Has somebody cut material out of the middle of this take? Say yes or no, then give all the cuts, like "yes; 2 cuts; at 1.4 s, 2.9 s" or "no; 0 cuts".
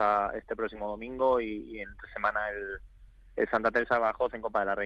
no; 0 cuts